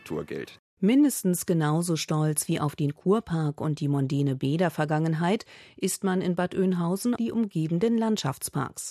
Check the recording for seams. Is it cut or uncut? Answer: cut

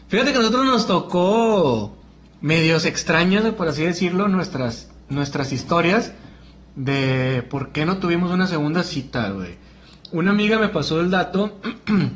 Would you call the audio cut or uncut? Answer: uncut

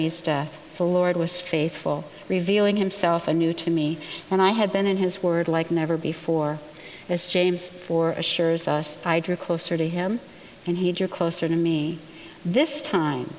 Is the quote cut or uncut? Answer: uncut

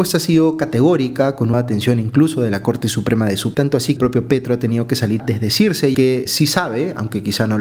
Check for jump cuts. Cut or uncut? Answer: cut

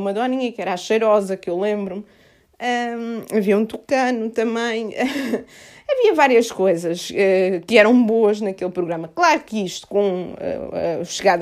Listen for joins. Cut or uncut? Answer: uncut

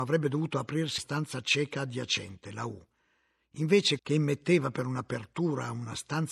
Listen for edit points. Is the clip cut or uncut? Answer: cut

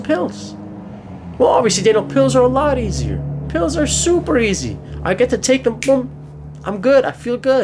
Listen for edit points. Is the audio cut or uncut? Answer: uncut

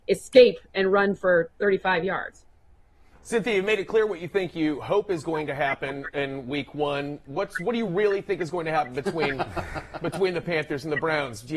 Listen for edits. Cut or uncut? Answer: uncut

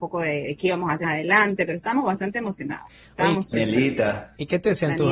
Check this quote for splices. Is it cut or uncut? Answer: cut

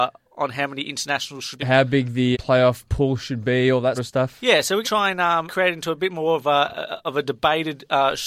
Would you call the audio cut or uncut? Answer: cut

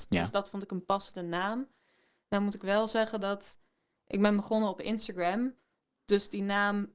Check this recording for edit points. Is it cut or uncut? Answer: uncut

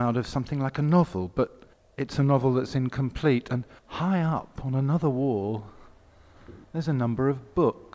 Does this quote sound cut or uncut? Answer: cut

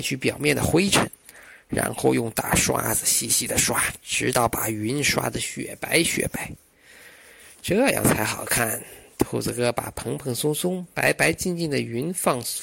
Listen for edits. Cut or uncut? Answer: uncut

